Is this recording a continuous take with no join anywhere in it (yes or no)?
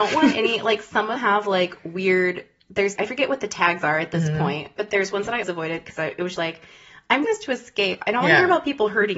no